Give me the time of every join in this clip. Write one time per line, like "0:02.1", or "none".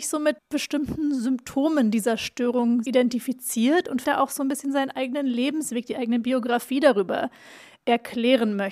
0:02.8
0:04.0